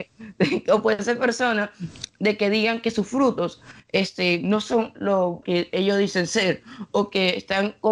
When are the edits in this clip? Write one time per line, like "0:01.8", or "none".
0:04.9
0:05.4